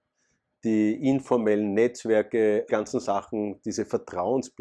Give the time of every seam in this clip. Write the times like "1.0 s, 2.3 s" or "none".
2.7 s

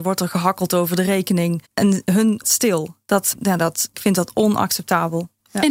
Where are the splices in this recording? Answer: 1.6 s, 2.4 s, 3.3 s, 3.9 s

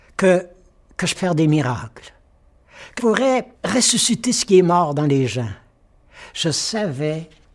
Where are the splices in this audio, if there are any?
1.1 s, 3.0 s, 3.5 s

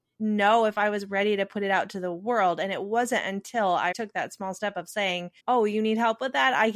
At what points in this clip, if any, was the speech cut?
3.9 s, 5.4 s

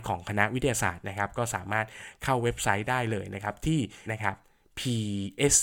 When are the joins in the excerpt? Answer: 4.1 s

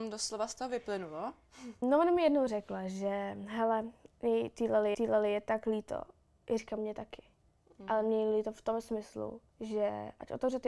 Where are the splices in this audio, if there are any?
1.8 s, 4.9 s, 6.8 s, 9.5 s

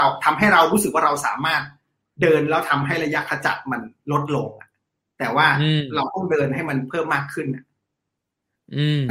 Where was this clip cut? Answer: none

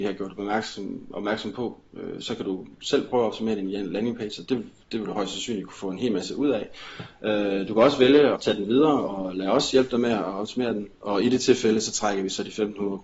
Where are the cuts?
8.4 s

